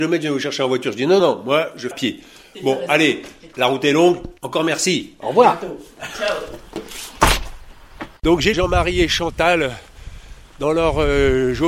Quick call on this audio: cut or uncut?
cut